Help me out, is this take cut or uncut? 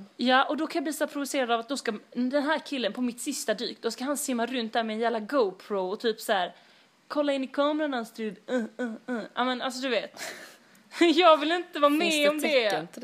uncut